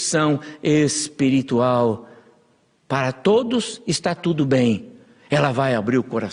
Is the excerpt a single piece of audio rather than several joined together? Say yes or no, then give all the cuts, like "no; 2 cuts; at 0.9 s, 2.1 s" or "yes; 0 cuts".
yes; 0 cuts